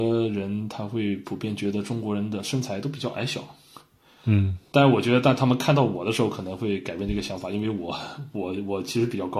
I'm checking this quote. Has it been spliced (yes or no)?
no